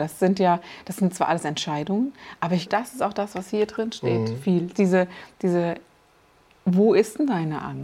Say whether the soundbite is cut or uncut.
cut